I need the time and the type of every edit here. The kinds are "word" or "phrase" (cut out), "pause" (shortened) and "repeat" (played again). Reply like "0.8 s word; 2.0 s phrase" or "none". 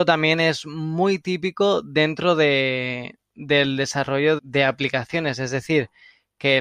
4.4 s word

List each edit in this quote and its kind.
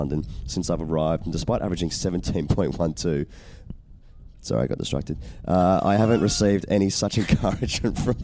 none

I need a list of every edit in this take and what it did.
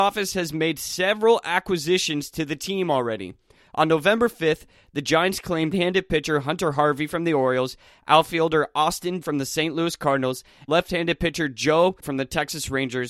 5.7 s word; 9.2 s word; 10.7 s word; 12.0 s word

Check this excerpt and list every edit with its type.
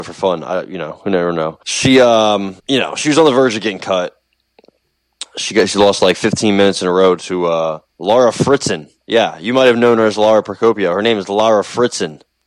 1.6 s pause; 2.6 s pause; 7.9 s pause; 9.0 s pause

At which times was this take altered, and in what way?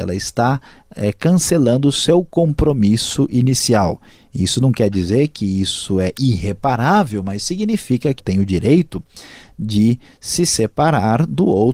8.2 s phrase

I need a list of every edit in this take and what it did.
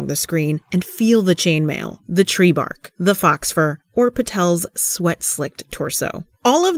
none

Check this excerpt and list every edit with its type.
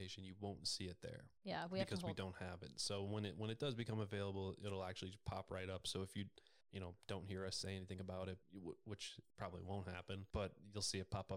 1.4 s pause; 6.6 s pause; 8.4 s pause; 9.3 s pause; 10.3 s pause

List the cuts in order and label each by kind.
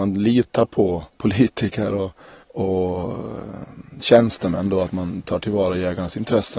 1.1 s pause; 2.4 s pause

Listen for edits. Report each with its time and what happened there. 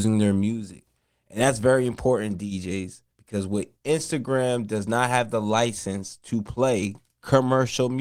3.1 s pause; 3.8 s word

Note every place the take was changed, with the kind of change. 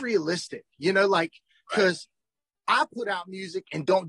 none

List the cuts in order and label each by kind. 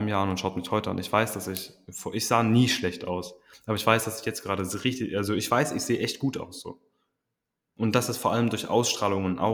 none

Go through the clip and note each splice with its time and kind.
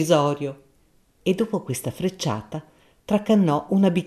none

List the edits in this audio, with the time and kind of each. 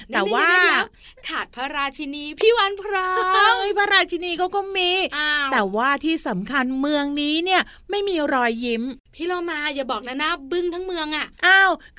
9.0 s pause

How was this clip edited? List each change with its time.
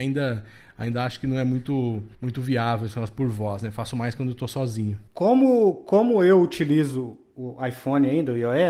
2.1 s pause; 5.1 s pause

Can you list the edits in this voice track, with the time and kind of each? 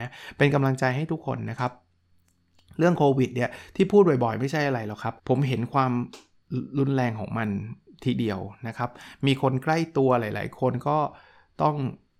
5.2 s pause

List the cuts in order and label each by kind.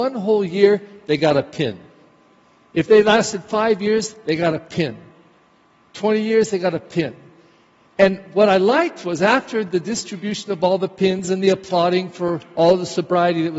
none

